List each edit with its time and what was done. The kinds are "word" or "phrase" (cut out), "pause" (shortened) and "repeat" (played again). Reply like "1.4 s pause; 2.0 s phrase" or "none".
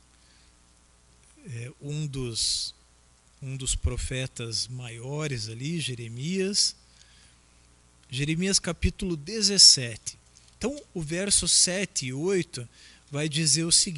none